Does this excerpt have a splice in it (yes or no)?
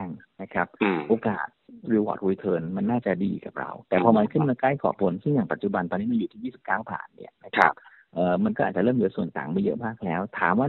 yes